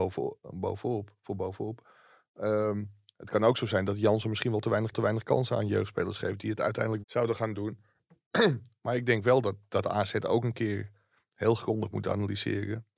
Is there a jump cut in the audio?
yes; 2 cuts; at 4.9 s, 7.0 s

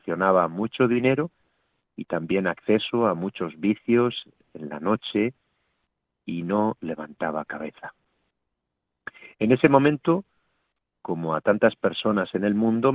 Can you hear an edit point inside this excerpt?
no; 0 cuts

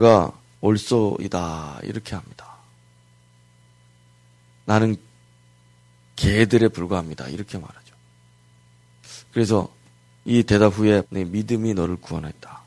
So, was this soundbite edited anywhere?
yes; 1 cut; at 11.0 s

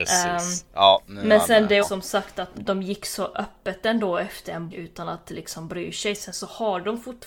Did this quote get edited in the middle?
yes; 3 cuts; at 1.8 s, 2.5 s, 4.7 s

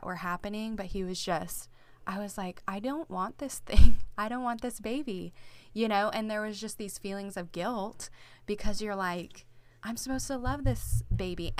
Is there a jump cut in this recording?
yes; 1 cut; at 9.8 s

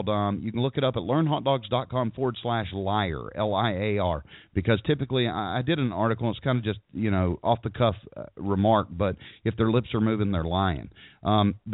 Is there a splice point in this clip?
no; 0 cuts

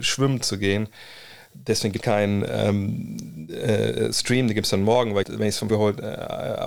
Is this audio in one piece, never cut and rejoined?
no; 3 cuts; at 2.0 s, 5.2 s, 5.7 s

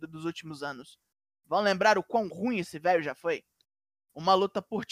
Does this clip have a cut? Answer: no; 0 cuts

